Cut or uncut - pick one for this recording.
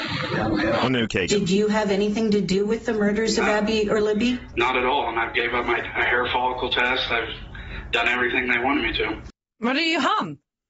cut